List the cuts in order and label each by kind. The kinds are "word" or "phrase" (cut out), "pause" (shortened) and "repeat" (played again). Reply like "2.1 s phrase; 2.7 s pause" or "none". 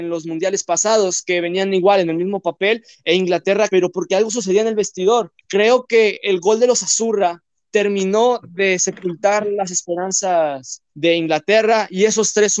3.7 s word; 5.4 s pause; 10.9 s pause

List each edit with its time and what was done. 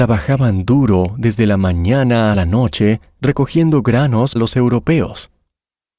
2.3 s word; 4.4 s word

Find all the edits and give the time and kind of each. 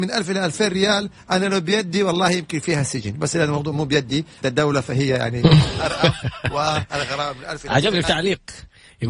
3.3 s word; 4.4 s word; 8.0 s word

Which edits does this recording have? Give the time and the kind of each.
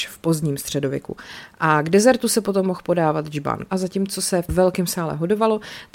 3.7 s phrase; 4.5 s word

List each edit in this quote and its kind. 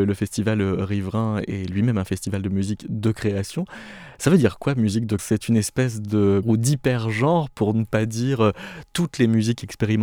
5.2 s word; 6.4 s word

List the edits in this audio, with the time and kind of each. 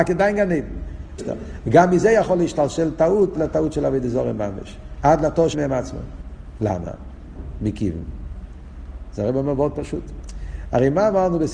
1.2 s word; 3.3 s word; 5.5 s word

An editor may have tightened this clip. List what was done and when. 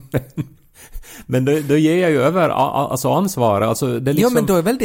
none

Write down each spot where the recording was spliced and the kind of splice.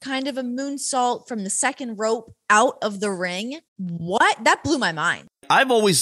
3.7 s pause

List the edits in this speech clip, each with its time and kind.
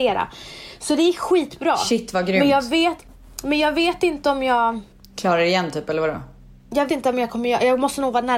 6.9 s word

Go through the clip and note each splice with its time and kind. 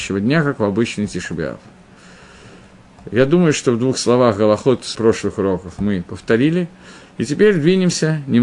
4.9 s word

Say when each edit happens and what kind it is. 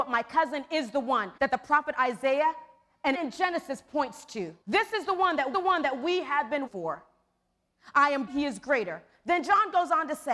1.4 s pause; 3.1 s phrase; 4.6 s pause; 5.5 s repeat; 6.7 s word; 8.3 s word

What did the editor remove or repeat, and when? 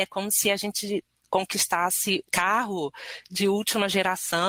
2.3 s word

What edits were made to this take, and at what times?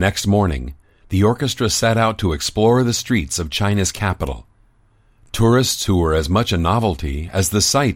none

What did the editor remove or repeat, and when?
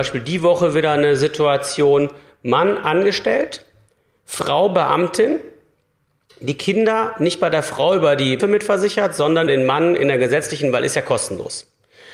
8.4 s word; 9.5 s word

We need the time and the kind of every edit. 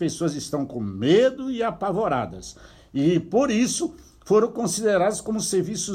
none

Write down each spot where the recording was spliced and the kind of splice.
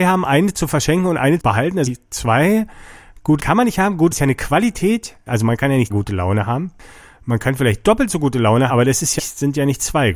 1.4 s word; 1.9 s word; 3.4 s word; 4.1 s word; 5.9 s word; 8.7 s word; 9.2 s word

